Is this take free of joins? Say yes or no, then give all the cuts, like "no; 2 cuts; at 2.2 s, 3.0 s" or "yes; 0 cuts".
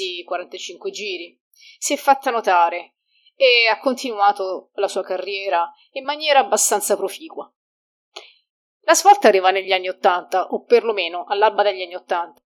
yes; 0 cuts